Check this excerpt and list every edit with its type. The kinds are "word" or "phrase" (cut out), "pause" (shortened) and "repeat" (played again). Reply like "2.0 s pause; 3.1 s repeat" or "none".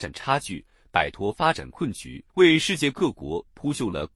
2.3 s pause